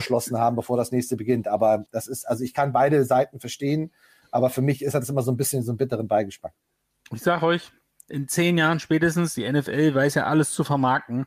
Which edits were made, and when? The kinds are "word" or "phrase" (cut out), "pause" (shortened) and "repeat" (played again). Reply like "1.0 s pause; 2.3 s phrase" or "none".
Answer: 1.9 s word; 8.1 s word